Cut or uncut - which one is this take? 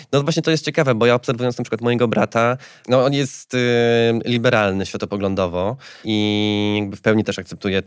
uncut